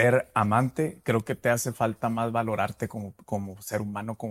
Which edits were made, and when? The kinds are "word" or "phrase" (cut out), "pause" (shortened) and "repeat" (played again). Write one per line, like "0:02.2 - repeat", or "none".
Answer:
none